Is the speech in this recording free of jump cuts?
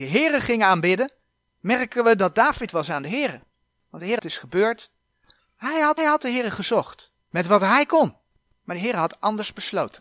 no; 4 cuts; at 2.7 s, 4.2 s, 6.0 s, 7.2 s

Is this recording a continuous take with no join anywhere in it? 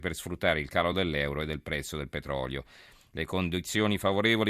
yes; 0 cuts

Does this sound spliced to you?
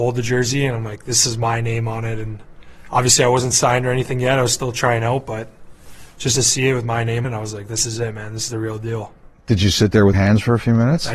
yes; 2 cuts; at 7.2 s, 10.1 s

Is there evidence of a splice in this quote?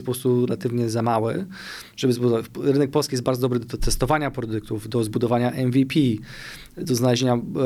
no; 0 cuts

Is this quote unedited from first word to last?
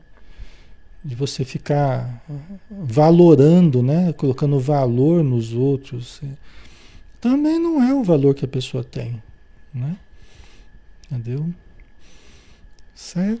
yes; 0 cuts

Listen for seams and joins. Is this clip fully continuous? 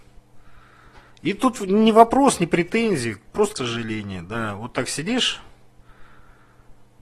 no; 1 cut; at 3.6 s

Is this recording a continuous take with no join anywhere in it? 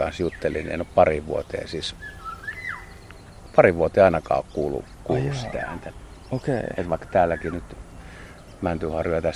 yes; 0 cuts

